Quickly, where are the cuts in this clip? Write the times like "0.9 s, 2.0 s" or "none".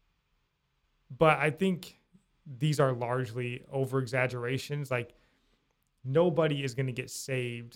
none

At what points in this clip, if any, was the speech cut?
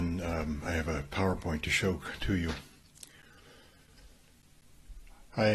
none

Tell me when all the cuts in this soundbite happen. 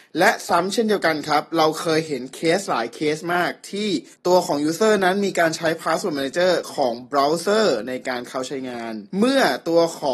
4.1 s, 9.1 s

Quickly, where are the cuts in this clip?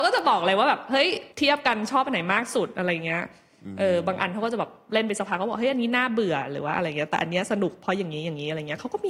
1.3 s

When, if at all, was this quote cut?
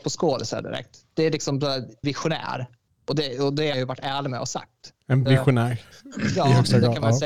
2.0 s, 2.8 s, 3.7 s, 5.3 s

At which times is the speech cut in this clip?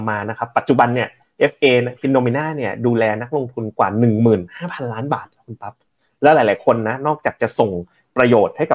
none

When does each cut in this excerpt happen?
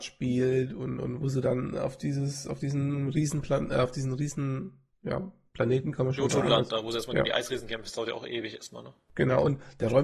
4.9 s

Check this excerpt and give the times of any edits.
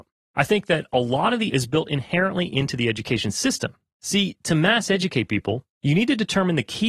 1.5 s, 5.7 s

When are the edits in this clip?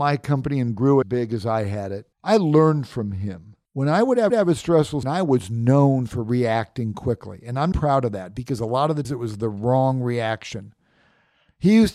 1.0 s, 2.1 s, 3.7 s, 4.3 s, 5.0 s, 7.7 s, 9.0 s

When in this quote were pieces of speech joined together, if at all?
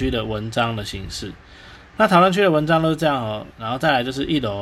3.5 s

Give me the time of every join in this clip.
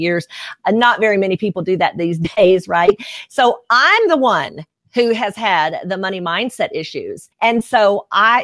7.3 s

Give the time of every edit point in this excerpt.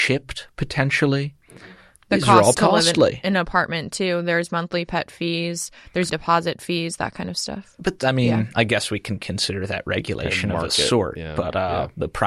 2.5 s, 6.1 s, 8.0 s

